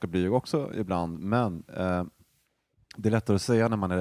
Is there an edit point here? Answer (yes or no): no